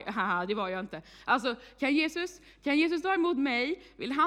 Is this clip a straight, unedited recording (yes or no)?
yes